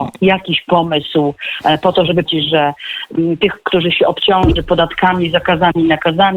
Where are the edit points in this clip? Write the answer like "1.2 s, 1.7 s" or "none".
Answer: 2.3 s